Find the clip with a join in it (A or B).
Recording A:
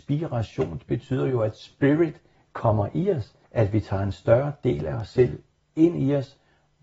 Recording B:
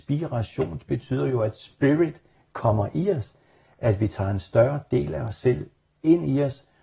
A